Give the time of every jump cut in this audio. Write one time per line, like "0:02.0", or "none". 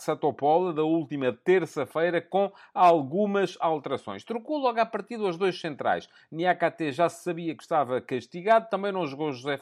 none